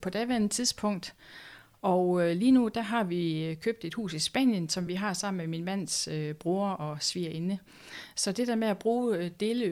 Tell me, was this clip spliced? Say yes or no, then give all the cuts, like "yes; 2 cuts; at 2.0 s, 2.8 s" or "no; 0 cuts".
no; 0 cuts